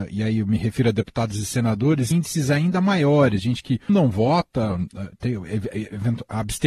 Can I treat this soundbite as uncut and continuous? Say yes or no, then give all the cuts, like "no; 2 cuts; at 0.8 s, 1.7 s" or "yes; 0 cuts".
no; 2 cuts; at 2.1 s, 3.9 s